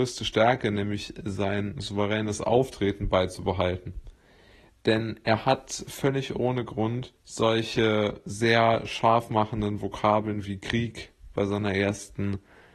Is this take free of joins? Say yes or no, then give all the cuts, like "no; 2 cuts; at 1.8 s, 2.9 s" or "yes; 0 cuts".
no; 1 cut; at 7.2 s